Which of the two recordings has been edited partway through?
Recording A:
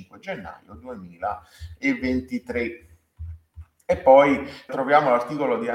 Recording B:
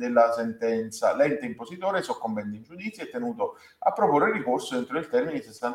A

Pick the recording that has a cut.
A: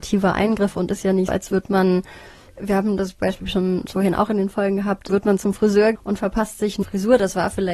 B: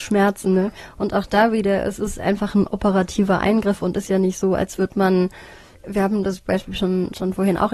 A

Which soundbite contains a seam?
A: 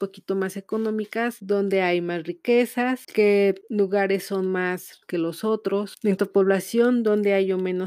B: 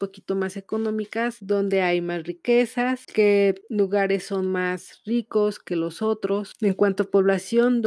A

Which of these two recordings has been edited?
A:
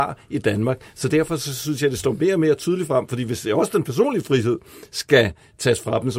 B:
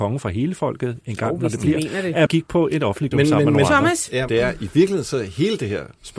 B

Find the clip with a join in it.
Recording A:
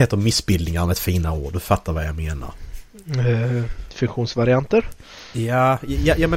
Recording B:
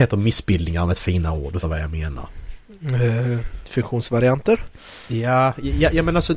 B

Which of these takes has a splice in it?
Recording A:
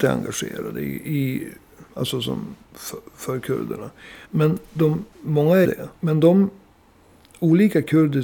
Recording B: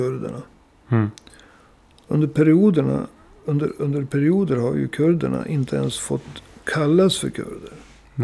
A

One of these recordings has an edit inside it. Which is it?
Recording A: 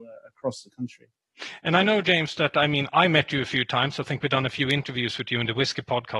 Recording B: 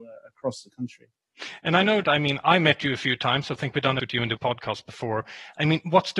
B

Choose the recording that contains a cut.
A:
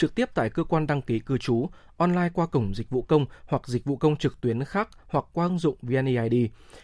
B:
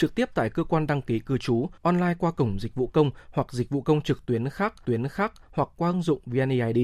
B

